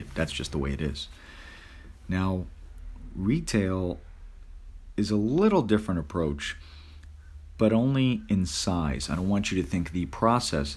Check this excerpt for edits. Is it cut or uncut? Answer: uncut